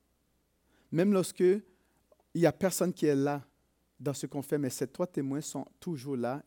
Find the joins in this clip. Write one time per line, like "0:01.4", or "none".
none